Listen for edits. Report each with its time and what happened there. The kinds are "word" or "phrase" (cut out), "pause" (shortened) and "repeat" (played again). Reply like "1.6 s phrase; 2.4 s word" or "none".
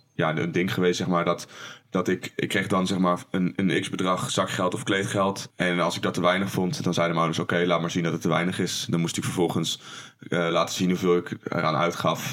none